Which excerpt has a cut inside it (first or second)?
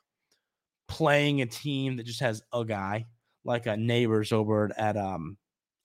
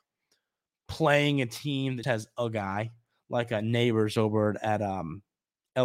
second